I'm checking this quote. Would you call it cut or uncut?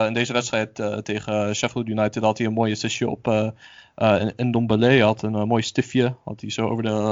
uncut